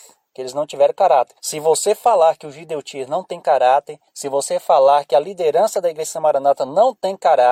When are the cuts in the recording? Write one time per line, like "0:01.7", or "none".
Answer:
0:01.4
0:04.1